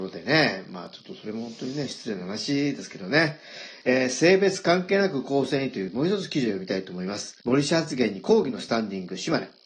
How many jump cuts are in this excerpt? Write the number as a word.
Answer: one